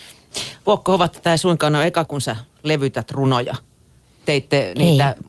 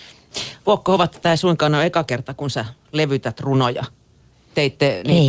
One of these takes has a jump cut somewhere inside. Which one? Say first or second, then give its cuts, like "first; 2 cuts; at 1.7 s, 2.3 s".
first; 1 cut; at 2.1 s